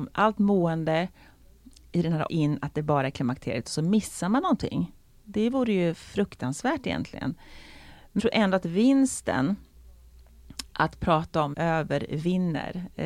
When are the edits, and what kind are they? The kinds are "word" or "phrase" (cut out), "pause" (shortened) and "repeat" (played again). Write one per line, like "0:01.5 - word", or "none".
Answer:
0:02.3 - phrase
0:08.2 - word
0:11.5 - word